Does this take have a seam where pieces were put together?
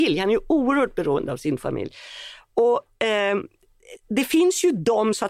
yes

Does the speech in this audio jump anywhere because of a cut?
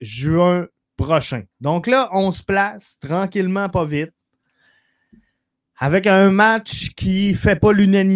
no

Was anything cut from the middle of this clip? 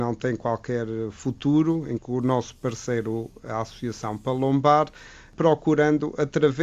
yes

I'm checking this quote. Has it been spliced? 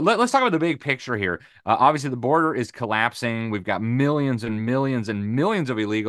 no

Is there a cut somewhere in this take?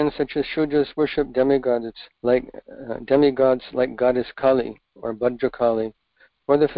yes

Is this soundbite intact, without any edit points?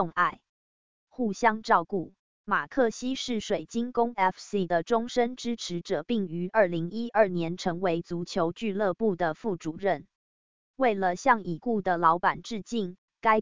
no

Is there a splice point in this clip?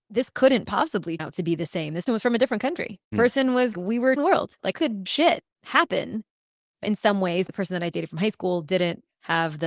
yes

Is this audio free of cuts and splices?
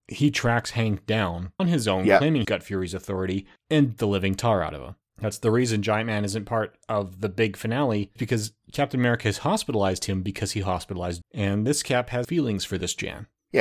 no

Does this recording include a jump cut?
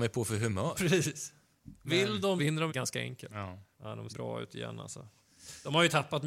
yes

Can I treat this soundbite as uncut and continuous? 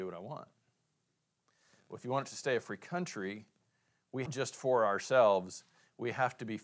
no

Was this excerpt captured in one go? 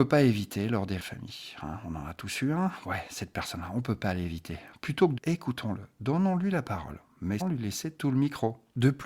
no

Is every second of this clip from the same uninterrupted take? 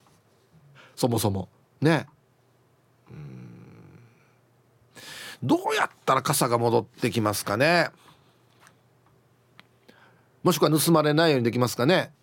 yes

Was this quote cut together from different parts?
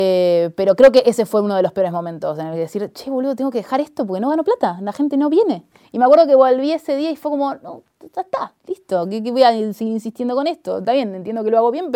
no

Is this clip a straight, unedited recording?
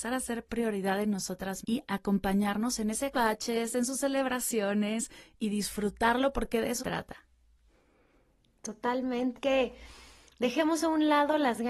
no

